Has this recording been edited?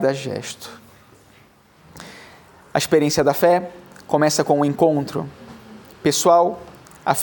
no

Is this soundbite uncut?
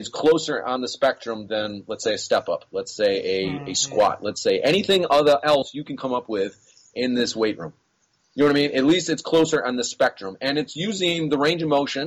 yes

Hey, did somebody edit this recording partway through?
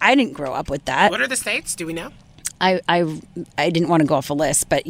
no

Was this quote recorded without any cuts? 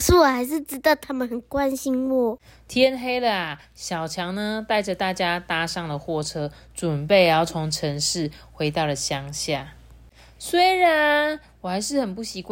yes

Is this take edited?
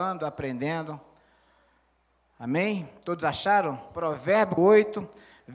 yes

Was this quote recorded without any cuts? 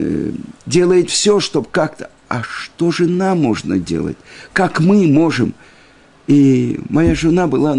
yes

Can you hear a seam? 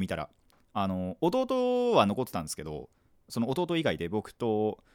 no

